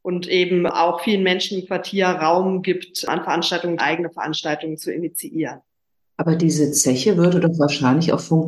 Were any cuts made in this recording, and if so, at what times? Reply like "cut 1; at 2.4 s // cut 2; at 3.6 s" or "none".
cut 1; at 3.8 s